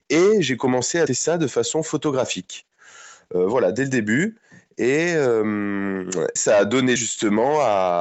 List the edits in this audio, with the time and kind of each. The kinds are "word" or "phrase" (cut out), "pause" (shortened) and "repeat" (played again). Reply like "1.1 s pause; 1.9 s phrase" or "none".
1.1 s word; 6.4 s word; 7.0 s word